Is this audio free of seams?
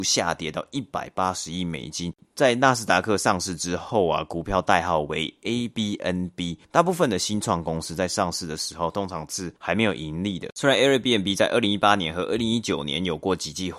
no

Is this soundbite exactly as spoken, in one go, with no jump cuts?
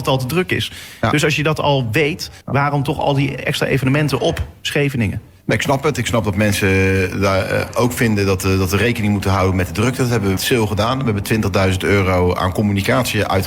no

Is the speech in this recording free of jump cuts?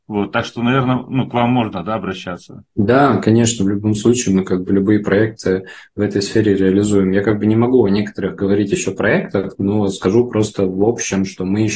no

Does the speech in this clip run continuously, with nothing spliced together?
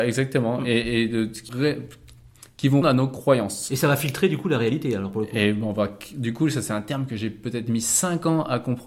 no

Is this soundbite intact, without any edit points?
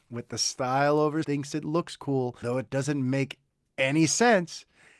no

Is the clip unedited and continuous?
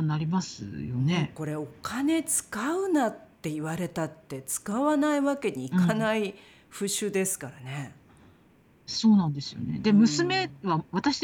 yes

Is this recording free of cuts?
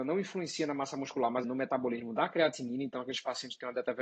no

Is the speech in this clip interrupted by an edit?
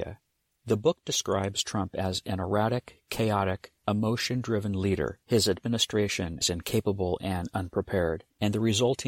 yes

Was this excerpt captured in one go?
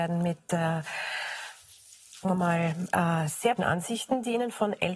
no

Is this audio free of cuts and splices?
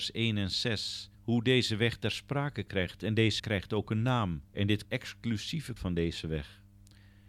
no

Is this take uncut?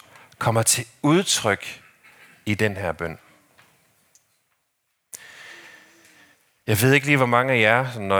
yes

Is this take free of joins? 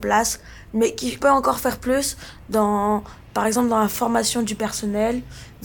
no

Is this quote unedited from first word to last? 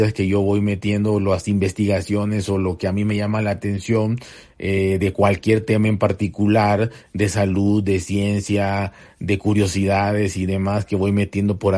yes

